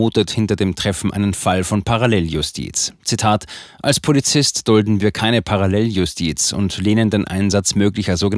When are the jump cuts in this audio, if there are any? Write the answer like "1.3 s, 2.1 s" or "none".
none